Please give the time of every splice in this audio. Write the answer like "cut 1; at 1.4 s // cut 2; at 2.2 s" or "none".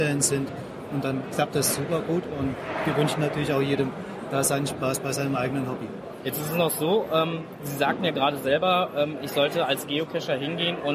none